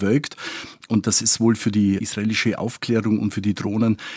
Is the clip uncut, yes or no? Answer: no